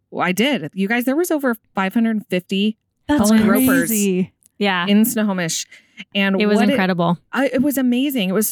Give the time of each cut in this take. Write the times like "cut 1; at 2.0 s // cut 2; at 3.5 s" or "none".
none